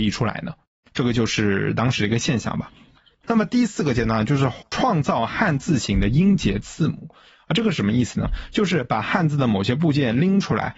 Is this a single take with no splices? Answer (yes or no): yes